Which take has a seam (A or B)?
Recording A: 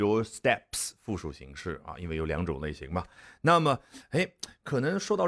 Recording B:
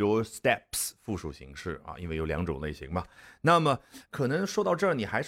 B